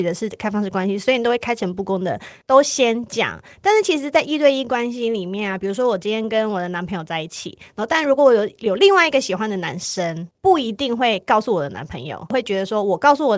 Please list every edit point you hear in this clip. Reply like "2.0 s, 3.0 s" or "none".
2.4 s